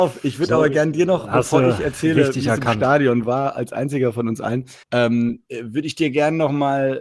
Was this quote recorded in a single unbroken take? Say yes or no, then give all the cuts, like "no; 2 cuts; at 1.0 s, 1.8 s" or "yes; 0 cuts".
no; 1 cut; at 4.8 s